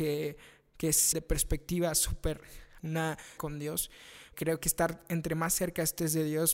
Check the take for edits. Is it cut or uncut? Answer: cut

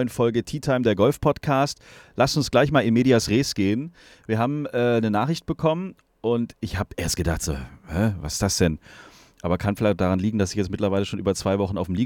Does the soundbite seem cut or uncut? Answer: uncut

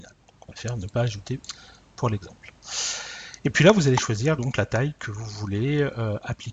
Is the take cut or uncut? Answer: uncut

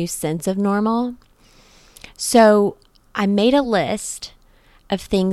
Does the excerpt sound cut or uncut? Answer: uncut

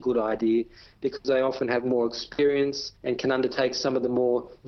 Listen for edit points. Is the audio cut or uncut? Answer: cut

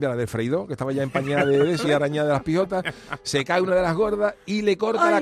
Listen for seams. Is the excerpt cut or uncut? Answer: cut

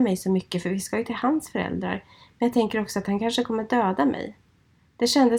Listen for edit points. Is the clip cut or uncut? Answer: uncut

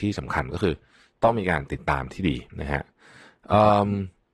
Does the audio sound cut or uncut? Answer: cut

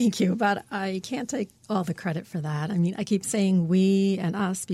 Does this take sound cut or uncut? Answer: uncut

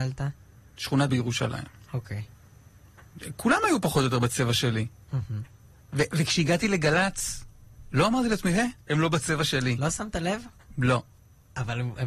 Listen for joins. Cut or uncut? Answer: cut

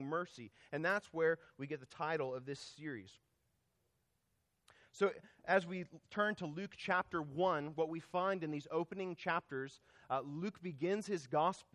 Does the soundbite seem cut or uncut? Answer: uncut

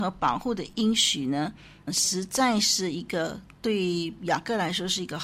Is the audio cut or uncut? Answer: cut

